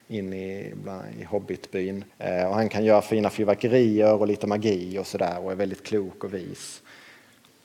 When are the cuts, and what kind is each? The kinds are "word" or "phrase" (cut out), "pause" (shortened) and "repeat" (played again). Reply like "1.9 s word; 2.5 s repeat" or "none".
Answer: 2.1 s pause